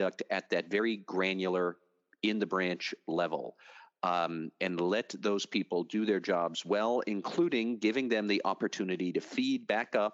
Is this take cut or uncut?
uncut